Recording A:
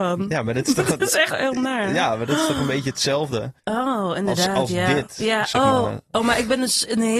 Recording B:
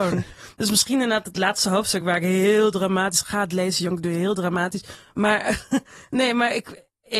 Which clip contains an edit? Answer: A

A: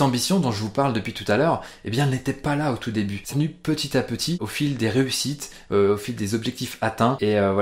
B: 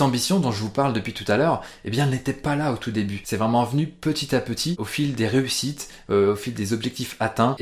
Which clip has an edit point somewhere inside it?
A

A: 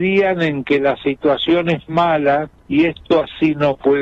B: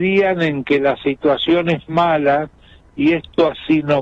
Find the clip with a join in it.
A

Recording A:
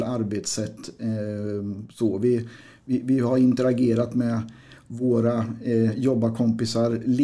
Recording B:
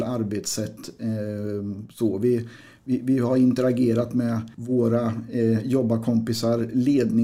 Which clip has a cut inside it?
B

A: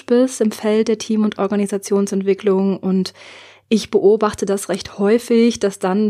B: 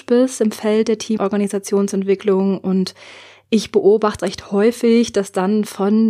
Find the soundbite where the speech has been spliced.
B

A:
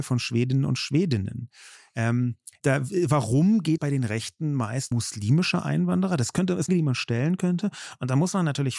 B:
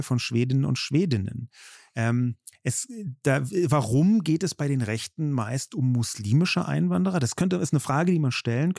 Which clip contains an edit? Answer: A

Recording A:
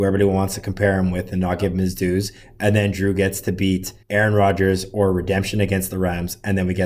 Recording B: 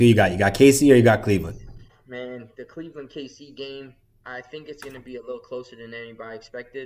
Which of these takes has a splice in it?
A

